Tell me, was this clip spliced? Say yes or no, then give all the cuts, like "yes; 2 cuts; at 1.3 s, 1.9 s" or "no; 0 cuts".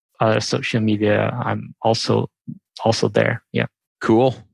no; 0 cuts